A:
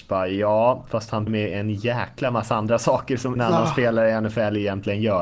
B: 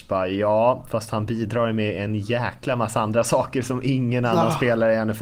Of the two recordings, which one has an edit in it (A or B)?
A